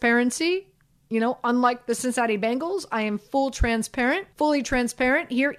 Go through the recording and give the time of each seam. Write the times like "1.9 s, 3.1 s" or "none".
4.3 s